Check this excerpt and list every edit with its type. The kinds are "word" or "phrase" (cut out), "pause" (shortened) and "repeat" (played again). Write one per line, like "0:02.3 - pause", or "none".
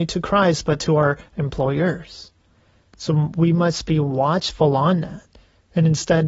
none

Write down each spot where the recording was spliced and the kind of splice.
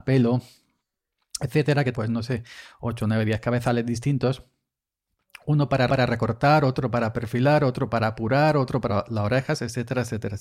0:01.9 - word
0:05.9 - repeat
0:08.9 - phrase

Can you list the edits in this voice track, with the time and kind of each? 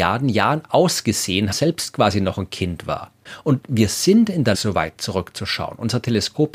0:01.5 - phrase
0:04.5 - word

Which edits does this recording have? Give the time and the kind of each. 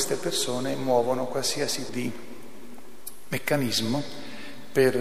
0:01.9 - word

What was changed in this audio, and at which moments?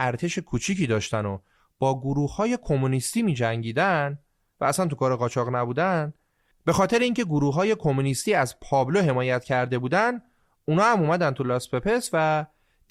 none

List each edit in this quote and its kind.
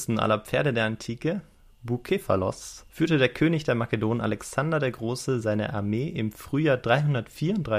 0:02.9 - pause

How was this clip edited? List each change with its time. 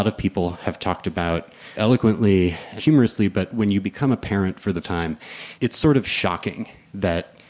0:01.8 - word
0:02.8 - word
0:04.8 - word
0:05.6 - pause

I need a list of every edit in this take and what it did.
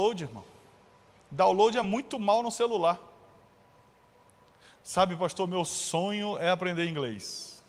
none

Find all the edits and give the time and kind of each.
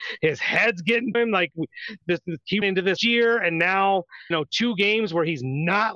0:01.1 - word
0:02.0 - word
0:02.6 - word
0:03.0 - word
0:04.3 - word

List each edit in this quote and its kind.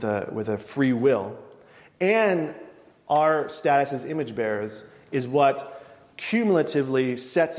none

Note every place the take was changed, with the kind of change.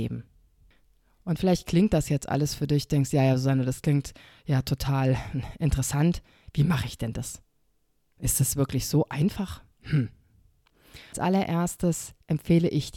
none

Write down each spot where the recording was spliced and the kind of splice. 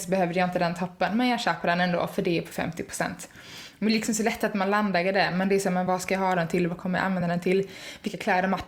none

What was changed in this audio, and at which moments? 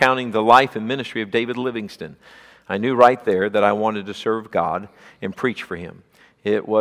none

